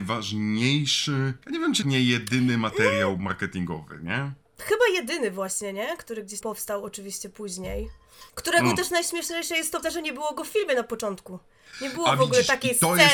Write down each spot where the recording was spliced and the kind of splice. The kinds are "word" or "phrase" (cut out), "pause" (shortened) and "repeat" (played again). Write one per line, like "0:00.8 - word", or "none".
0:01.4 - pause
0:01.8 - word
0:04.4 - pause
0:06.4 - word
0:08.3 - pause
0:09.8 - word